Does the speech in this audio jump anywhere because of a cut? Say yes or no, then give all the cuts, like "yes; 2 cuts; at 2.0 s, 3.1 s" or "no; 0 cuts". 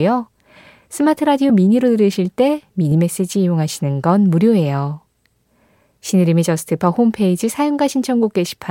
no; 0 cuts